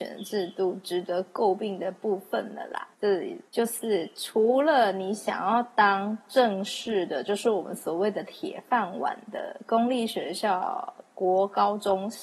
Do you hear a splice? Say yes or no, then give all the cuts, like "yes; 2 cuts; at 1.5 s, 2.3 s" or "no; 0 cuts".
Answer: yes; 2 cuts; at 2.9 s, 3.5 s